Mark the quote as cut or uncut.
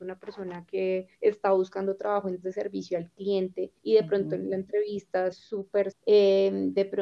cut